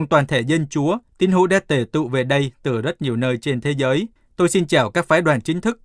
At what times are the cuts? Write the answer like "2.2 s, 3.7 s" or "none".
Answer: 4.1 s